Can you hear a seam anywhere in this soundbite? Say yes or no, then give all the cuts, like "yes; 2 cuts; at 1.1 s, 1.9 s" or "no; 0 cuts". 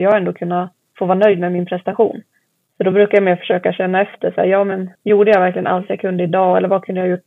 yes; 1 cut; at 4.9 s